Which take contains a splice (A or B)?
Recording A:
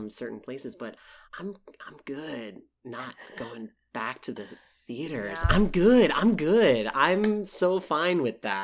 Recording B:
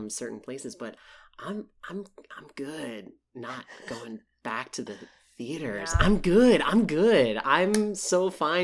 A